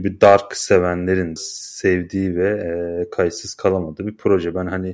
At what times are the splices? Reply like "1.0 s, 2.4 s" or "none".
1.4 s